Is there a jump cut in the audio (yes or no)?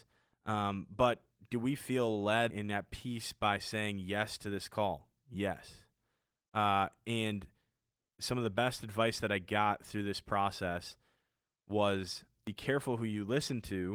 yes